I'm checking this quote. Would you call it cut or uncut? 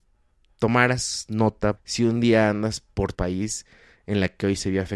cut